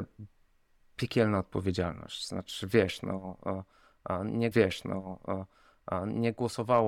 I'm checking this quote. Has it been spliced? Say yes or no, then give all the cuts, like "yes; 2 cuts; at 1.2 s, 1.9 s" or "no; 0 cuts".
yes; 1 cut; at 4.5 s